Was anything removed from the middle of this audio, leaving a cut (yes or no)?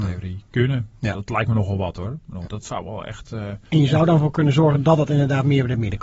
yes